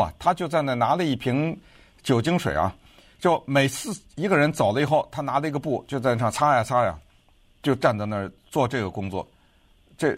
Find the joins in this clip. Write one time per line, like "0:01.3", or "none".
none

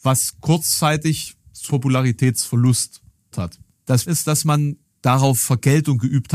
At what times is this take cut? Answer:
0:01.7
0:03.3
0:04.1

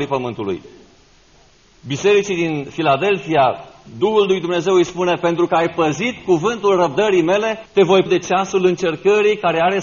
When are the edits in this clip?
0:07.7
0:08.1

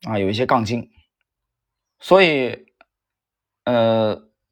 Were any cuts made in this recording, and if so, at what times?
0:01.4

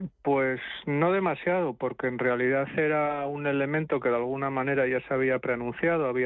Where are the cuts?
none

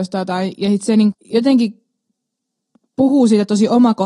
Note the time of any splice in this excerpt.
0:01.1

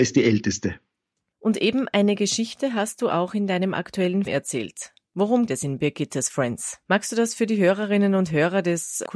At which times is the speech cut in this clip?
0:00.9
0:04.3
0:05.5
0:06.8

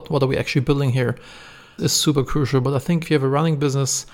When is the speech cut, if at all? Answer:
0:01.8
0:03.0

